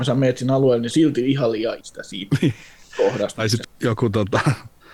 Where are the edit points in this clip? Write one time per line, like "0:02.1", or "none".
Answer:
0:00.9
0:01.8
0:03.6

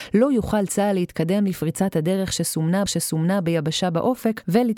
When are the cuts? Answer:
0:02.9

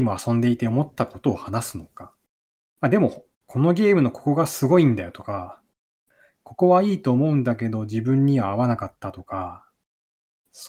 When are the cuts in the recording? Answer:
0:03.3
0:08.9

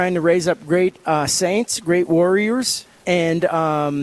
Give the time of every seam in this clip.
none

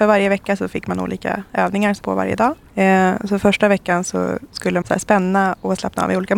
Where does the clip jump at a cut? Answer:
0:02.0
0:02.6
0:04.8

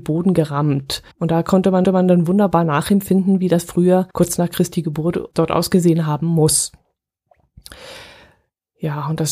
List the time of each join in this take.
0:01.1
0:01.8
0:04.1
0:05.3

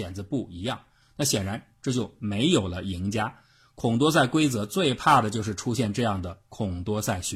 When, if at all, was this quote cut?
none

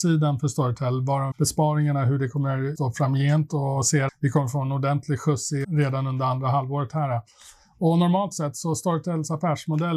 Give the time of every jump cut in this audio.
0:01.3
0:02.8
0:04.1
0:05.6

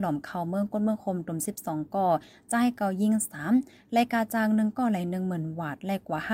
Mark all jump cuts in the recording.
none

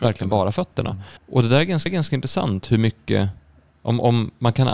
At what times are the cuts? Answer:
0:01.2
0:01.9

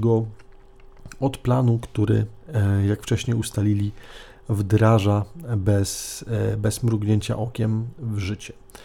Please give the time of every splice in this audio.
none

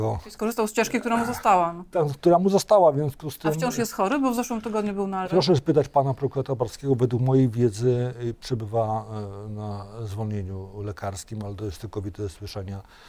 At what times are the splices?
0:05.3

